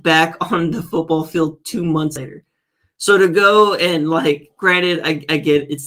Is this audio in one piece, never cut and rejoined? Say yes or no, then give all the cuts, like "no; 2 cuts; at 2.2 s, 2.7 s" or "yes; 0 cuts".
yes; 0 cuts